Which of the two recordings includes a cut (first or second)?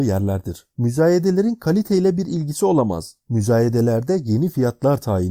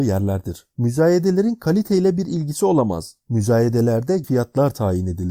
second